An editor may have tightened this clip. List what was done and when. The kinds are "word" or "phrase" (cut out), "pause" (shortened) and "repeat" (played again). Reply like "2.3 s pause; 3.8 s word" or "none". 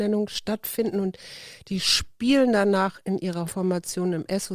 3.5 s word